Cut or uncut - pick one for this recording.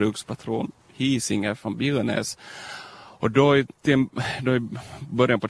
uncut